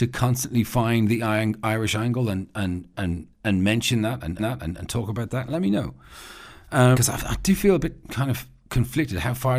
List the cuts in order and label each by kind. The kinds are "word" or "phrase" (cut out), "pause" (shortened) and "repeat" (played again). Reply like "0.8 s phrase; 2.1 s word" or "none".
2.9 s word; 3.3 s pause; 4.4 s repeat; 6.9 s word; 8.0 s pause